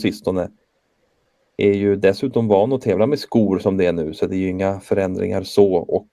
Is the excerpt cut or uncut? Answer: uncut